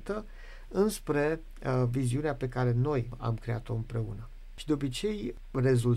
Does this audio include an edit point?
no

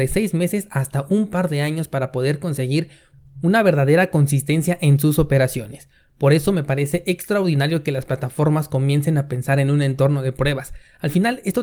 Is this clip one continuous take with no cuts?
yes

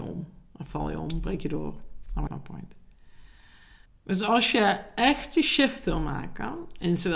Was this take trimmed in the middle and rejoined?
yes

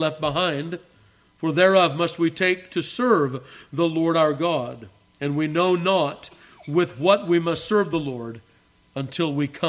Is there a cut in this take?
no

